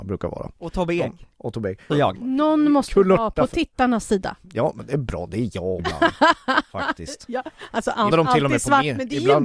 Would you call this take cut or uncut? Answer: cut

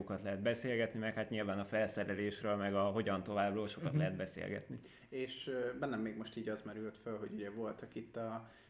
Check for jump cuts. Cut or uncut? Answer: uncut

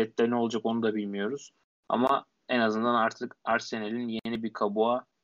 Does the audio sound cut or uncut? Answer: uncut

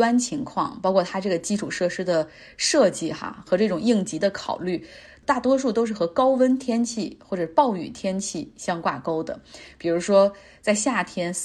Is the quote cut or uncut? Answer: uncut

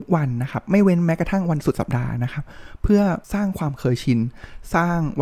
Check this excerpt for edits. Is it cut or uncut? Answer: cut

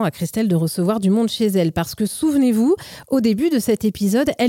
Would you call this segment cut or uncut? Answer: uncut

